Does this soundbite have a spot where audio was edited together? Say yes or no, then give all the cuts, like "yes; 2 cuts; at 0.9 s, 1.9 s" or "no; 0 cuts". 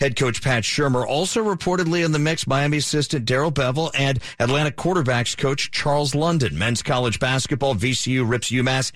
no; 0 cuts